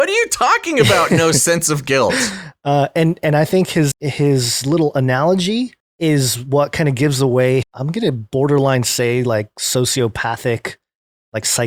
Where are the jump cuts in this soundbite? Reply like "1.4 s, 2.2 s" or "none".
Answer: 3.9 s, 5.8 s, 7.6 s